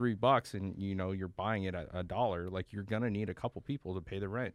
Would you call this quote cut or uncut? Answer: uncut